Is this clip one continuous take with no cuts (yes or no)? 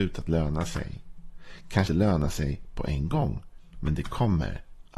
no